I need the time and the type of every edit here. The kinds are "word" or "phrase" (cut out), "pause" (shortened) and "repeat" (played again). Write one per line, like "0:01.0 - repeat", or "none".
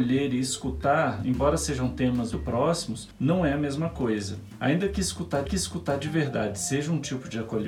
0:02.3 - word
0:05.5 - repeat